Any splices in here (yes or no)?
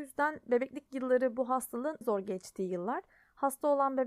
yes